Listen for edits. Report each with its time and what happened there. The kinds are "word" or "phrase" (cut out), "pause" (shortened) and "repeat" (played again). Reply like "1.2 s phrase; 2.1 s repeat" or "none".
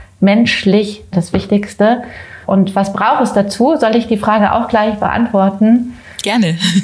1.1 s phrase; 2.4 s pause

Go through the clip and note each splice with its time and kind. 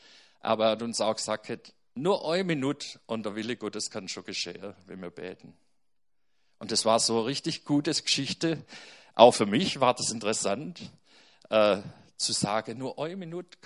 none

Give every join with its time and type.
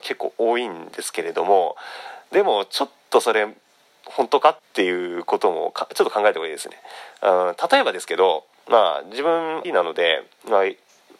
4.6 s pause; 9.6 s word

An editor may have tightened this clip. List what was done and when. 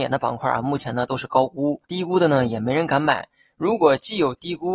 1.8 s pause

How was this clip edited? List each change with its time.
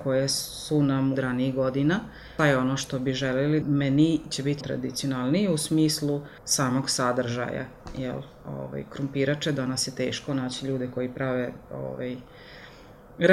1.1 s phrase; 2.4 s word; 3.6 s word; 4.6 s word; 6.4 s pause

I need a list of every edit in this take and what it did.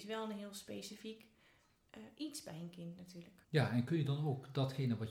3.4 s pause

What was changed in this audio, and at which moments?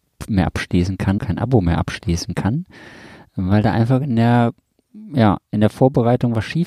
1.2 s word

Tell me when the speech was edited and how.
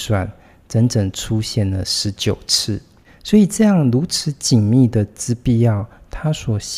none

